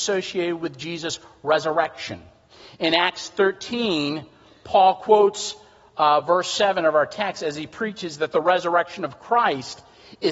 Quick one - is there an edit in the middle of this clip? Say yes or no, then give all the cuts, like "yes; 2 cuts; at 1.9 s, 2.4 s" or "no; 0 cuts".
no; 0 cuts